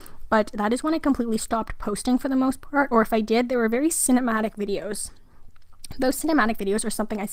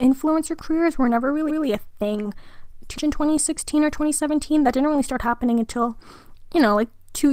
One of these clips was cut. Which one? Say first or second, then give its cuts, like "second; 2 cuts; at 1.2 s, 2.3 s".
second; 2 cuts; at 1.5 s, 3.0 s